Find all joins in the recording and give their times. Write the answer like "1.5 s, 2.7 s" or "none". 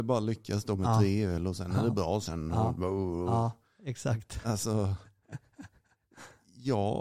none

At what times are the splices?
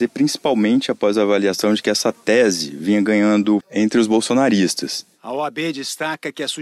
3.6 s

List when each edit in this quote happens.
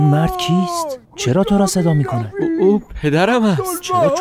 1.0 s

